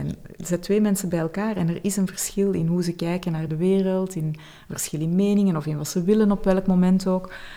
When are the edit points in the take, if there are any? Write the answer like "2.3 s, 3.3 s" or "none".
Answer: none